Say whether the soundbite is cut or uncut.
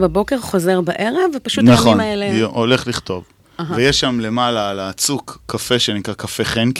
uncut